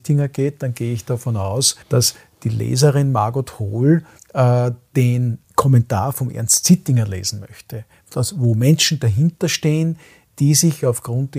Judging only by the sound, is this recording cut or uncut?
cut